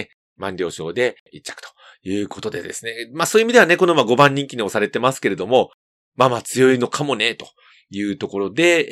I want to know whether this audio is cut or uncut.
cut